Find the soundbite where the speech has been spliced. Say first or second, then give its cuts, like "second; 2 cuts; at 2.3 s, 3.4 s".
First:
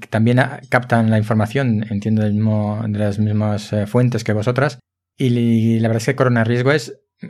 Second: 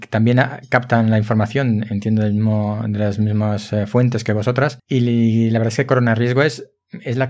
second; 1 cut; at 4.8 s